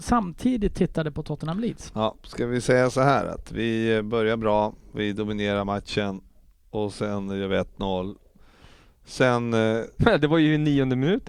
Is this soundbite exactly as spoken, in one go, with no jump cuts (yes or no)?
yes